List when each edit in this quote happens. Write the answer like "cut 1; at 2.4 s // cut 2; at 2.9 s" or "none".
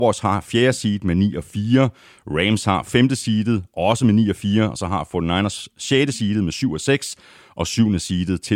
none